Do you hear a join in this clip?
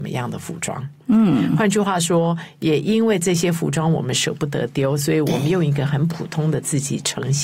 no; 0 cuts

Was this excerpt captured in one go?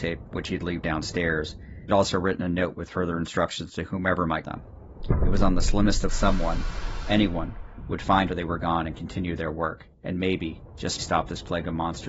no; 6 cuts; at 1.9 s, 4.4 s, 6.1 s, 8.3 s, 9.9 s, 11.0 s

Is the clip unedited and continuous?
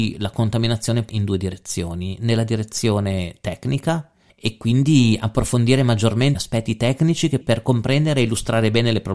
no; 4 cuts; at 1.1 s, 4.3 s, 6.3 s, 7.4 s

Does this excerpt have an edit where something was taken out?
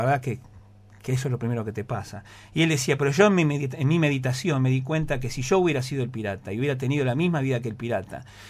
no; 0 cuts

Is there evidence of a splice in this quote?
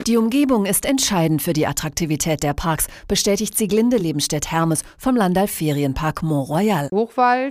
no; 0 cuts

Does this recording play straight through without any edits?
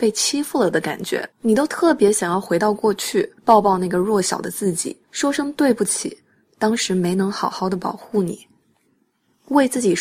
no; 3 cuts; at 1.3 s, 3.4 s, 5.0 s

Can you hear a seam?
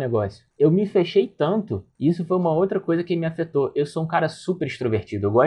no; 0 cuts

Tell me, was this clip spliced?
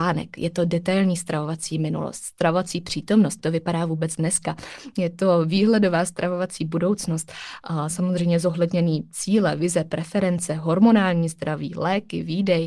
yes; 2 cuts; at 3.4 s, 7.9 s

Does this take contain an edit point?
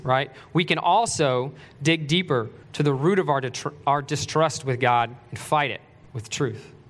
yes; 1 cut; at 2.6 s

